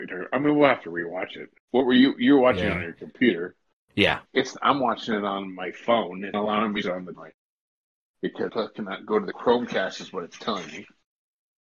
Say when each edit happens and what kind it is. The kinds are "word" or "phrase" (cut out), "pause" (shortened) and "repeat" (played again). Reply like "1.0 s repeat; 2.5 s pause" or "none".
1.6 s pause; 4.2 s word; 6.3 s word; 6.8 s phrase; 7.1 s word; 8.5 s phrase